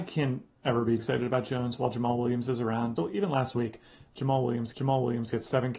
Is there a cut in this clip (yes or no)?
yes